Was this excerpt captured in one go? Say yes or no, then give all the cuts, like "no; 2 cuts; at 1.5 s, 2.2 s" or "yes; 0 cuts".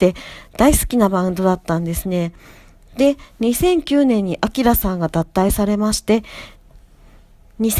yes; 0 cuts